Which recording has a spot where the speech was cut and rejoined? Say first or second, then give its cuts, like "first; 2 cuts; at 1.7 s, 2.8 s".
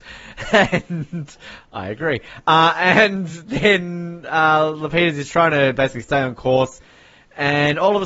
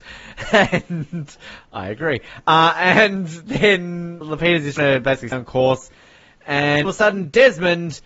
second; 4 cuts; at 4.2 s, 4.8 s, 5.3 s, 6.8 s